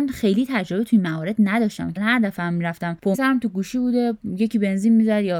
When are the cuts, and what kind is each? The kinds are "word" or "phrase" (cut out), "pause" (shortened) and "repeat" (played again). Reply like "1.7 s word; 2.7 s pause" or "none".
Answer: 2.0 s word; 3.1 s word